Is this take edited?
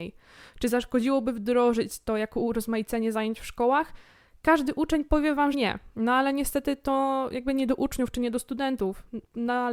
yes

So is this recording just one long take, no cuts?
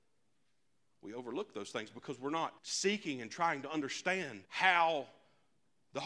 no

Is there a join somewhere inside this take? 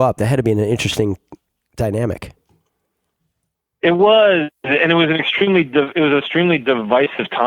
no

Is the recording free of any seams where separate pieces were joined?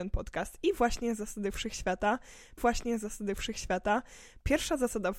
no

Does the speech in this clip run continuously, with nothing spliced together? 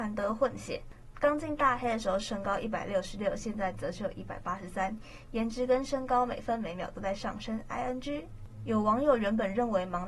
yes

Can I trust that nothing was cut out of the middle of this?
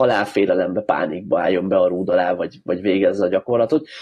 yes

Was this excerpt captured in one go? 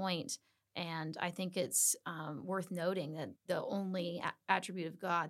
no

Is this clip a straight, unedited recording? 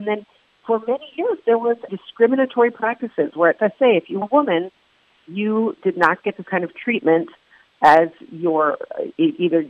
no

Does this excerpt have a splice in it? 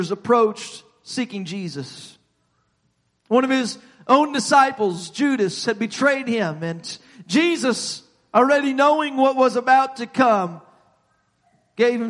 no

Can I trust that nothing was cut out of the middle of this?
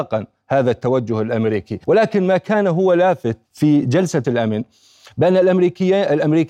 no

